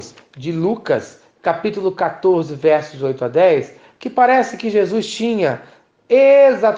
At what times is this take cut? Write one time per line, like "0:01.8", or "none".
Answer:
none